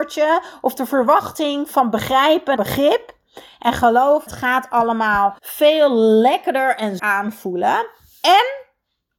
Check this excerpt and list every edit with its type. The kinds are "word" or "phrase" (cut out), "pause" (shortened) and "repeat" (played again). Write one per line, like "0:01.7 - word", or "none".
0:02.6 - word
0:04.3 - phrase
0:05.4 - pause
0:07.0 - word